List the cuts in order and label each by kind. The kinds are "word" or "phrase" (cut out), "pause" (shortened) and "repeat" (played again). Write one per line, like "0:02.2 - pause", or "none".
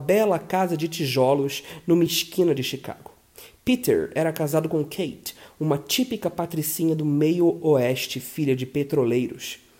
none